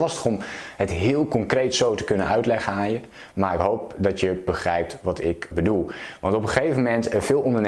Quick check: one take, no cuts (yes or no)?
no